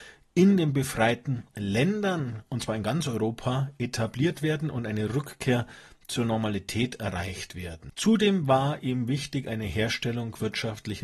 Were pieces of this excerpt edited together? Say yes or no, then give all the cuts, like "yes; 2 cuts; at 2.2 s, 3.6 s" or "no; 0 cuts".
no; 0 cuts